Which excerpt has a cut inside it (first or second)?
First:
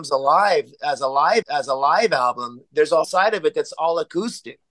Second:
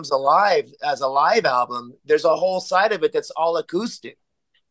first